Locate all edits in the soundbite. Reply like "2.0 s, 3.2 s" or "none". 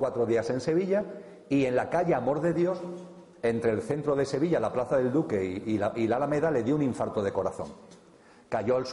none